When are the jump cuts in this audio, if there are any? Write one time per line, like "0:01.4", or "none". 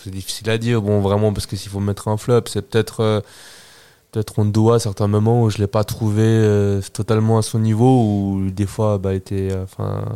none